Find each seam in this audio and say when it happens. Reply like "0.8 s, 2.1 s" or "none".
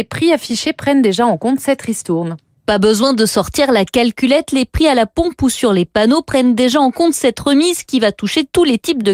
none